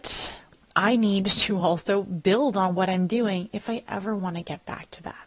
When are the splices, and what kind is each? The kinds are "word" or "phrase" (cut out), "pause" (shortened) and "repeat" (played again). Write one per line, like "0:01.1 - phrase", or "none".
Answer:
none